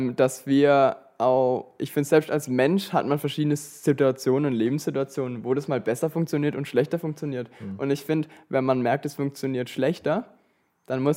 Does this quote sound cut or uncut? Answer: uncut